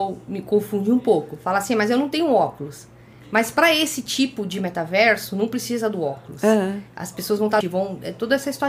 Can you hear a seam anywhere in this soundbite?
yes; 1 cut; at 7.6 s

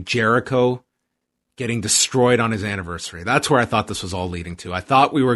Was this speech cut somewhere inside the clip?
no; 0 cuts

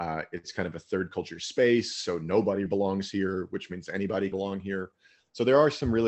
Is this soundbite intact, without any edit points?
no; 2 cuts; at 2.7 s, 4.3 s

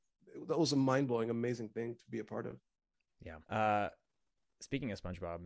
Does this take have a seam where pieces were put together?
yes; 1 cut; at 3.4 s

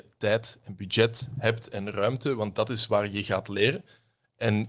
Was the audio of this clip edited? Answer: no; 0 cuts

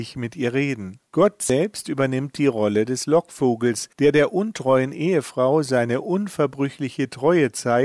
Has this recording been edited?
yes; 2 cuts; at 1.1 s, 3.9 s

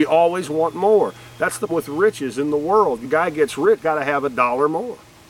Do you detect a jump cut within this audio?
yes; 3 cuts; at 1.7 s, 3.0 s, 3.8 s

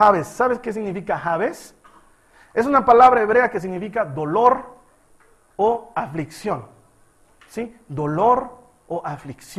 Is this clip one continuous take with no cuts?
yes; 0 cuts

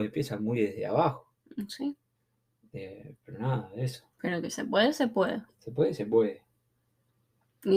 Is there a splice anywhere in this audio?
yes; 2 cuts; at 2.2 s, 4.1 s

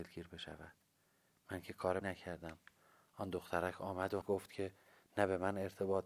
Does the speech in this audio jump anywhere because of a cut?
yes; 2 cuts; at 2.0 s, 4.2 s

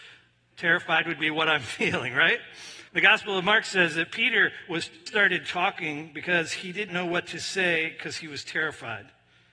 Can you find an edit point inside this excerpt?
yes; 3 cuts; at 2.9 s, 5.1 s, 6.9 s

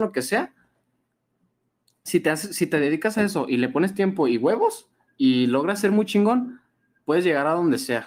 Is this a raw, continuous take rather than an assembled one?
yes; 0 cuts

